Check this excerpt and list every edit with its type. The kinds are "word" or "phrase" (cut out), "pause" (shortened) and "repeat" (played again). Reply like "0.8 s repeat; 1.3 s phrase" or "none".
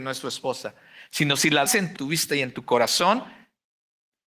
1.7 s word; 2.0 s phrase